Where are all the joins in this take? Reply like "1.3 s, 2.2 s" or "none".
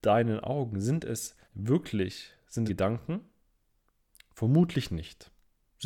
1.4 s, 2.7 s